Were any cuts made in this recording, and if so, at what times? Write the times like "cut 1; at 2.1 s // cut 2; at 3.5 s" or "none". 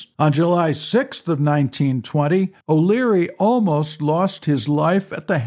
cut 1; at 2.6 s